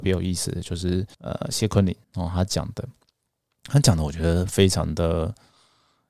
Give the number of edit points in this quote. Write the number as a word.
two